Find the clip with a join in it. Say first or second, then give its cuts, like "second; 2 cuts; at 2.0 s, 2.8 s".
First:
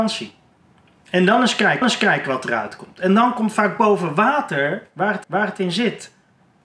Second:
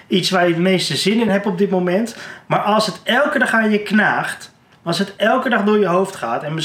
first; 2 cuts; at 1.8 s, 5.2 s